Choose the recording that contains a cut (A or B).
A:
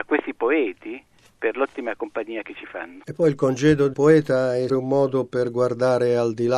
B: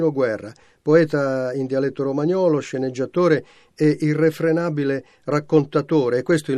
A